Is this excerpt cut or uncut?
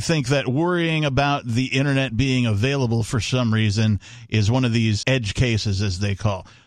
cut